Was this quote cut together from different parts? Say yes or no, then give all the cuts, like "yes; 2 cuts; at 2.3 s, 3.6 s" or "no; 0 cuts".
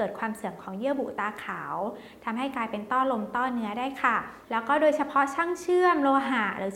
yes; 1 cut; at 4.4 s